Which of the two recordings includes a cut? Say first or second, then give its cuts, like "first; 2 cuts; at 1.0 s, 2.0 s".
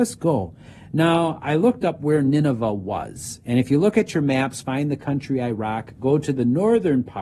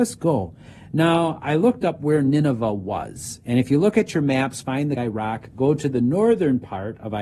second; 1 cut; at 5.0 s